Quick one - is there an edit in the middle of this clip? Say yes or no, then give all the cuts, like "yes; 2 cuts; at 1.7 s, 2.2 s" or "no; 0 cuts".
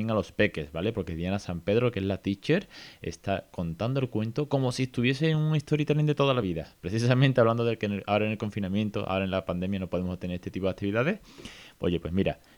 no; 0 cuts